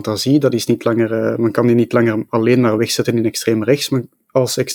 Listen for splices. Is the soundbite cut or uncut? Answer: uncut